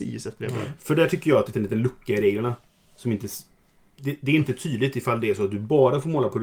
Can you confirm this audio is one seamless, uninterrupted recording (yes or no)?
no